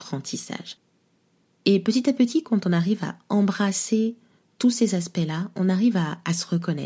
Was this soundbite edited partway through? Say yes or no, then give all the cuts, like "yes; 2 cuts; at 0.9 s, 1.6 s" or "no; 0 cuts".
no; 0 cuts